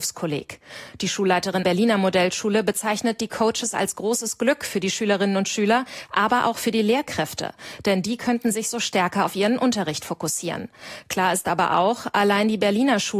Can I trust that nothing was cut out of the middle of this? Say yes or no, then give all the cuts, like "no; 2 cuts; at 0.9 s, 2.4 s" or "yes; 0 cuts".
no; 1 cut; at 1.6 s